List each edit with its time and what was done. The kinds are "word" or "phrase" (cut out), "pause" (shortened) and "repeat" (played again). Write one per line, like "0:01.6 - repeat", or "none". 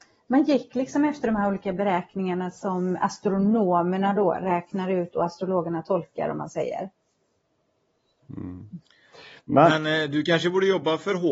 none

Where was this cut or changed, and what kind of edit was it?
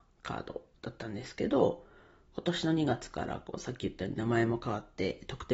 none

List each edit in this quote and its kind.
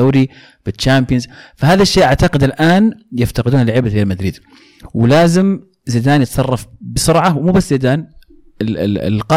none

